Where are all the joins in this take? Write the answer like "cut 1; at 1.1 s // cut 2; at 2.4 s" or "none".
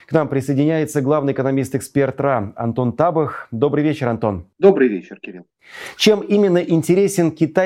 cut 1; at 4.5 s